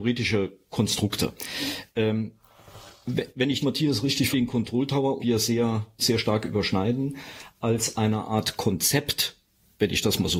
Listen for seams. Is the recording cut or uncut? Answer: cut